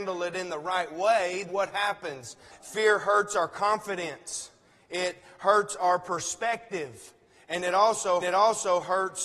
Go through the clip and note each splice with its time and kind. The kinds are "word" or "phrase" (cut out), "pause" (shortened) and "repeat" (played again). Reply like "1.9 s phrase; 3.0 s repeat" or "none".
1.5 s word; 2.5 s word; 8.2 s repeat